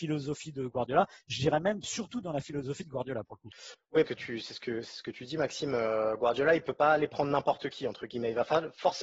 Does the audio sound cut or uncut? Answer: cut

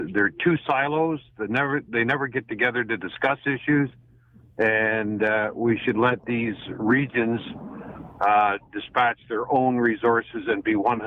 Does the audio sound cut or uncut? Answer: uncut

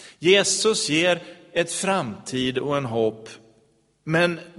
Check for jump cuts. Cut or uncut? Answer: uncut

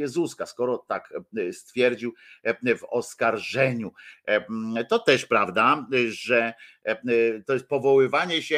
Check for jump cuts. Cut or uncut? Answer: uncut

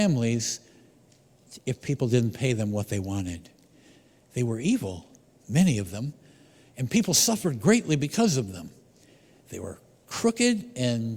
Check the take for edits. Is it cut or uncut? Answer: uncut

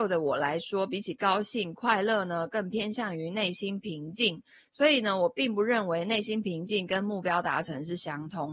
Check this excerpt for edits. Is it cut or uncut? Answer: uncut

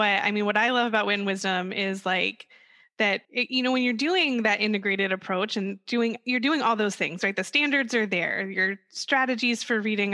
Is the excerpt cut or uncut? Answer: cut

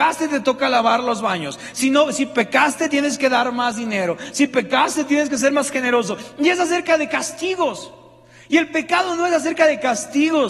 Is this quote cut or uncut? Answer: uncut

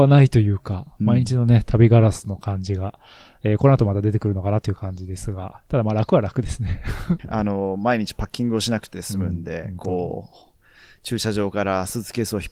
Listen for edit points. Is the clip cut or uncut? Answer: cut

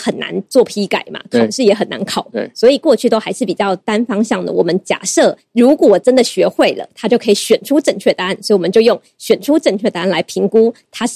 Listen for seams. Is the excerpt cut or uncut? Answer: uncut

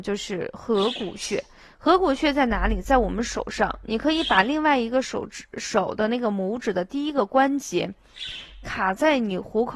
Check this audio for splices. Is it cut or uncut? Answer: uncut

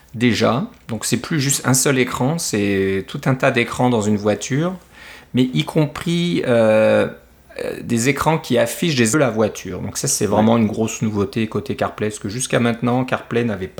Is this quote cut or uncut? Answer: cut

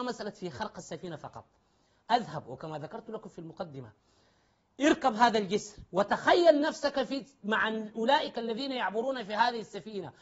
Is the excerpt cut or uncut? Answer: uncut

